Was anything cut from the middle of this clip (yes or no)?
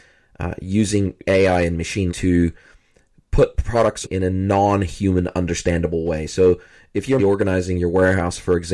yes